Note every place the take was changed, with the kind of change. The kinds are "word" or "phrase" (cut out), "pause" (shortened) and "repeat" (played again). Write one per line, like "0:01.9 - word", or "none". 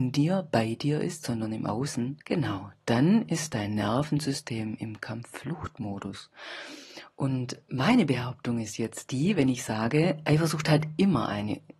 0:02.2 - pause